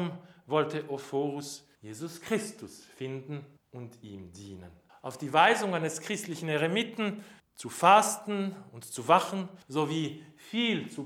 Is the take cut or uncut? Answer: cut